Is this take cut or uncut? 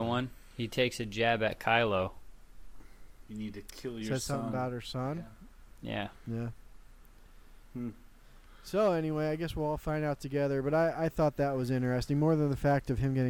uncut